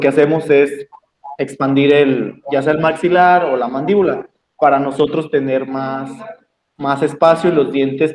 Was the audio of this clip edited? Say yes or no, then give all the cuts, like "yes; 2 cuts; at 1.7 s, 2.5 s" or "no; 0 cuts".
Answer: no; 0 cuts